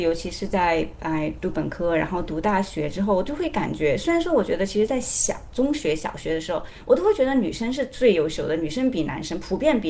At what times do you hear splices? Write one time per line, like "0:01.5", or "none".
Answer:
none